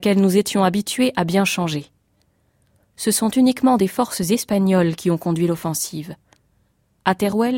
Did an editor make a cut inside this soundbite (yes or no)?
no